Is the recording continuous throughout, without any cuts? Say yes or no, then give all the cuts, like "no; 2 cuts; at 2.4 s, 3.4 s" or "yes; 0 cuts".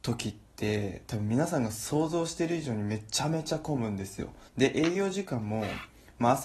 no; 1 cut; at 4.5 s